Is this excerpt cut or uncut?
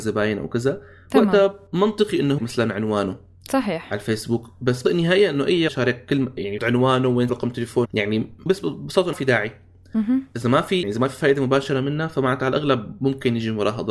cut